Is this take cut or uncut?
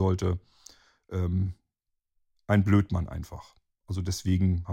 uncut